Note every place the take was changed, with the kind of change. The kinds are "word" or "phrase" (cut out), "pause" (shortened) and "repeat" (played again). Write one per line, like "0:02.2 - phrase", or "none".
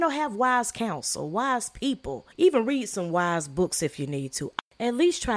0:02.3 - pause

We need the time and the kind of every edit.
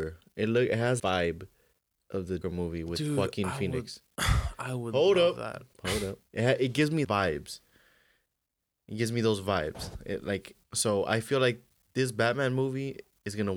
0:01.0 - word
0:02.4 - word
0:05.7 - pause
0:06.3 - pause
0:07.0 - word
0:10.6 - pause

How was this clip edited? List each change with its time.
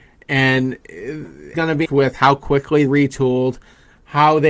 0:01.5 - word
0:01.9 - word
0:02.9 - word

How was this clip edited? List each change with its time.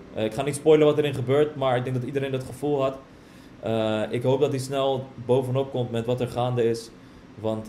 none

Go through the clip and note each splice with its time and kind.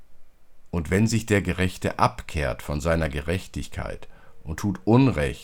none

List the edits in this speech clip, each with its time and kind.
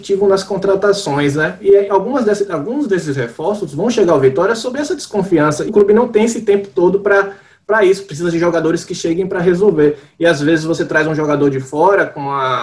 0:05.7 - word

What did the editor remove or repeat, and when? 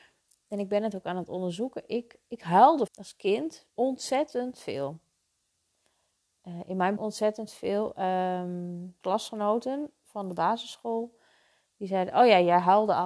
0:02.9 - word
0:03.7 - pause
0:07.0 - word
0:09.0 - phrase

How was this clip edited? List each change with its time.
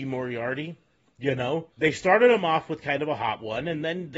0:01.7 - pause

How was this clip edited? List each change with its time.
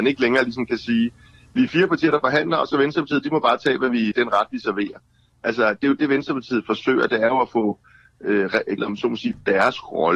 0:04.1 - word
0:08.8 - word

